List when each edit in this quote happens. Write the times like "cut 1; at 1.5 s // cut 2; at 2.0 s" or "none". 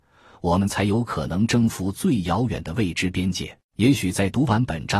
cut 1; at 3.6 s